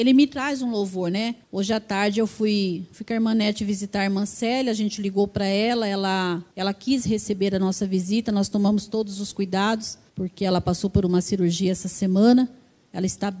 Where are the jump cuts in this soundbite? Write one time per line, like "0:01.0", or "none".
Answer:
0:01.4
0:06.5
0:10.1